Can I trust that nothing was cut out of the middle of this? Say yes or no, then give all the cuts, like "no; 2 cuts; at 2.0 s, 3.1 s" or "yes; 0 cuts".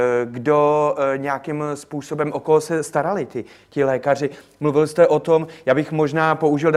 yes; 0 cuts